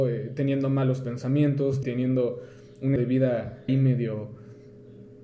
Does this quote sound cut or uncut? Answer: cut